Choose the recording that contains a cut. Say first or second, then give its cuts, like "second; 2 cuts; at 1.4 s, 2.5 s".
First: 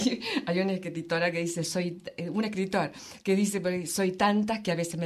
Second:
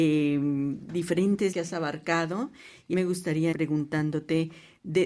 second; 3 cuts; at 1.5 s, 2.9 s, 3.5 s